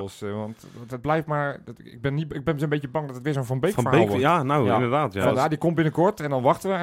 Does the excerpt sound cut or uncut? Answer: uncut